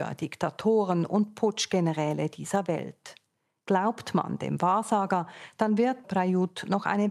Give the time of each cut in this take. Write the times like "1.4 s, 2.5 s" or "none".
6.0 s